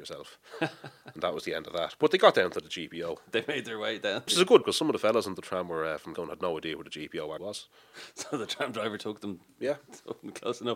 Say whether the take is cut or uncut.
cut